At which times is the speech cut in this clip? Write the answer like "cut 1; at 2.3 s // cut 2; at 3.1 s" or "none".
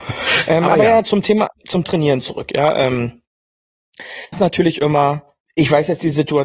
cut 1; at 1.8 s // cut 2; at 4.3 s // cut 3; at 5.5 s